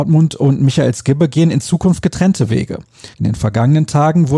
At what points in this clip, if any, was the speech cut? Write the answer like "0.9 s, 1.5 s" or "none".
3.1 s

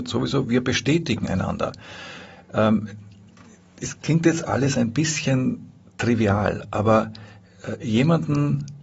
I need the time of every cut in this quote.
none

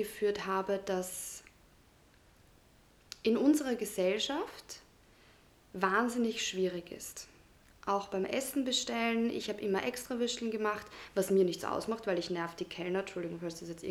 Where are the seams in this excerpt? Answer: none

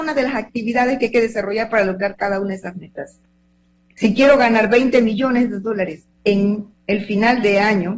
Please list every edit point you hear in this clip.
6.1 s

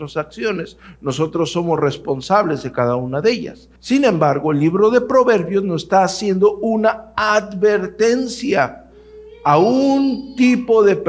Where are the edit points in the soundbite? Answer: 3.8 s

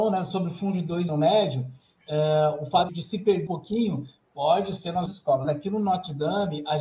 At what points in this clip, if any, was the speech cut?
1.1 s, 2.9 s, 3.5 s, 5.1 s, 5.4 s

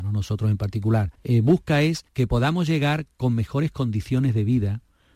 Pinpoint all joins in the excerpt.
1.2 s, 2.1 s

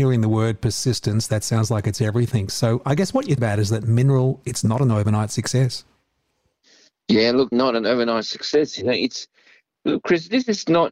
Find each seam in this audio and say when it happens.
3.4 s, 4.4 s, 7.5 s

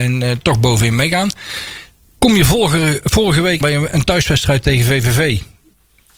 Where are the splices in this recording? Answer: 3.6 s

